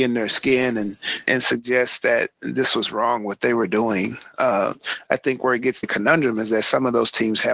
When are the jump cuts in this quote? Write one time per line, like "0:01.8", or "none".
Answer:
0:01.3
0:05.8